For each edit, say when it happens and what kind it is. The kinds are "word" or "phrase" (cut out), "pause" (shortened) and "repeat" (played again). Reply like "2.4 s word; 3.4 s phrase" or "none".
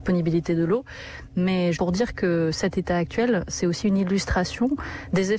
1.7 s word

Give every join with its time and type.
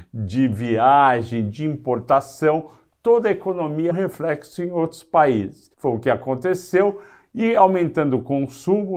3.9 s phrase; 5.7 s pause

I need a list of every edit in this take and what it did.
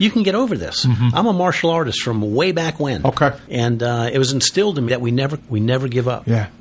3.4 s pause; 4.9 s word; 5.4 s word

